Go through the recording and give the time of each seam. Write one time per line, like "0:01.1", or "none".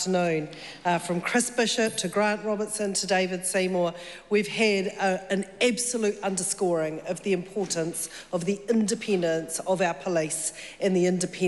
none